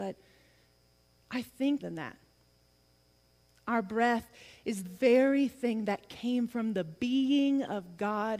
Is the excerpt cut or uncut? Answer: cut